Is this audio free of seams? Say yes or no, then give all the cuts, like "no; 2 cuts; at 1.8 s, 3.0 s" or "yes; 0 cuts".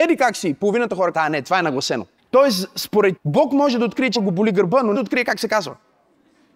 no; 5 cuts; at 1.1 s, 2.2 s, 3.2 s, 4.1 s, 4.9 s